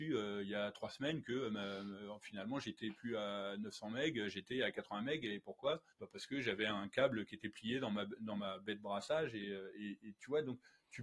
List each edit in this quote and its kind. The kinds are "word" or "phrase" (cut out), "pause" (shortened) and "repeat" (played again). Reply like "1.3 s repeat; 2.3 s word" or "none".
5.9 s pause